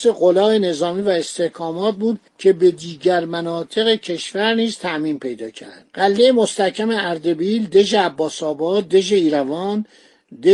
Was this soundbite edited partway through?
yes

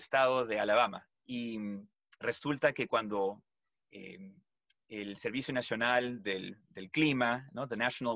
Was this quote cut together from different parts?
no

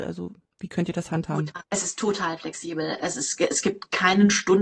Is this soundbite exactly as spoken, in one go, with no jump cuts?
no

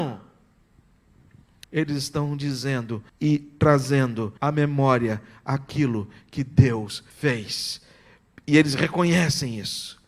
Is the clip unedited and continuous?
no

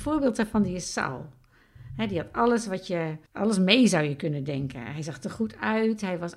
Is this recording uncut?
no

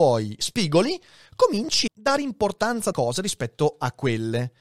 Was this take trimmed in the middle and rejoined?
yes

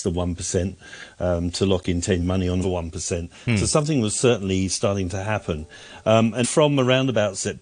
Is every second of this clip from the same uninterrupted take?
no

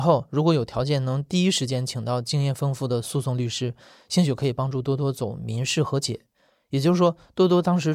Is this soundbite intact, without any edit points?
yes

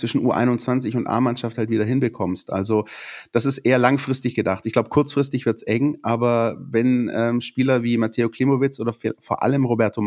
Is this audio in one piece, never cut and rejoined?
yes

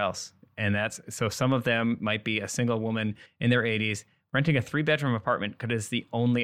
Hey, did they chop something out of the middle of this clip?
no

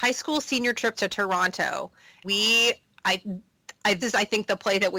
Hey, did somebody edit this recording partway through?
yes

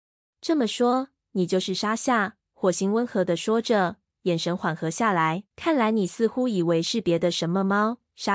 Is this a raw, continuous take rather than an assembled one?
no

